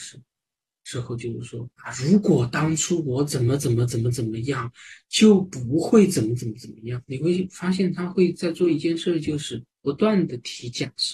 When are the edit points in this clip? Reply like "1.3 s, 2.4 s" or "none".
1.7 s, 9.7 s